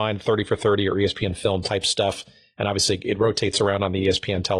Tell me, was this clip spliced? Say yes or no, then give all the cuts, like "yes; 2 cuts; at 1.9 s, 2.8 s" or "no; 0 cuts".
no; 0 cuts